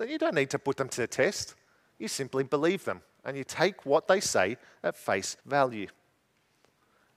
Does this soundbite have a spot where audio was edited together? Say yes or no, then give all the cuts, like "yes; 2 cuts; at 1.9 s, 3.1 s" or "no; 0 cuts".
yes; 1 cut; at 5.4 s